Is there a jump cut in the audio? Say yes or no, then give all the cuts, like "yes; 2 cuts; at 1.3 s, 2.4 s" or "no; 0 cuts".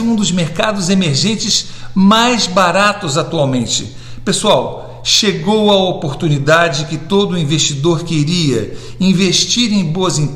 no; 0 cuts